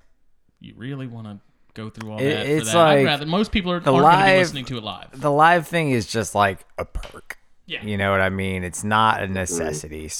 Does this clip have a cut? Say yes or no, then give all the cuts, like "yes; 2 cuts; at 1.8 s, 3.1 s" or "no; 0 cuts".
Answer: no; 0 cuts